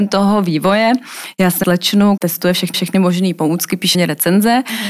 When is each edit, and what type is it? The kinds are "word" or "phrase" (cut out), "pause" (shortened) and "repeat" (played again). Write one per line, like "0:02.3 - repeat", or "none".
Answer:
0:01.6 - word
0:02.2 - word
0:02.7 - repeat
0:03.9 - word